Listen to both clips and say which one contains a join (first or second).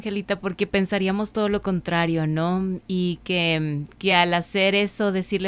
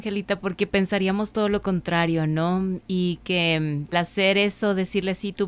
second